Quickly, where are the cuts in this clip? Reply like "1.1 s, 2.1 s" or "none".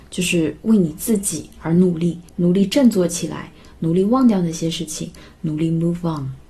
2.3 s